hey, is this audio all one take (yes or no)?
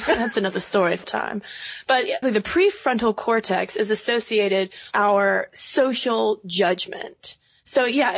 no